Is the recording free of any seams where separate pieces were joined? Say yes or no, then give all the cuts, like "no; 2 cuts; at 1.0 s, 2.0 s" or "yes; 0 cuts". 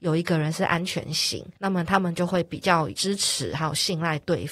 no; 1 cut; at 1.6 s